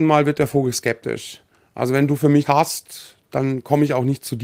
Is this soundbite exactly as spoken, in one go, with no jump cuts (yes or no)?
no